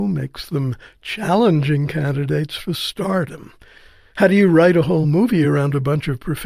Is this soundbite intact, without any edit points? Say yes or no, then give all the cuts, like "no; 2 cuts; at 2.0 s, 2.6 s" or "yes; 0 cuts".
yes; 0 cuts